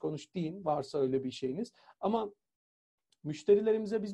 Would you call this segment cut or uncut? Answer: uncut